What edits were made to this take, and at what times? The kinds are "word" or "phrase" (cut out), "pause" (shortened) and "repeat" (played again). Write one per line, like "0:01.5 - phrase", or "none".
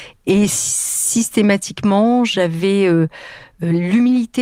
none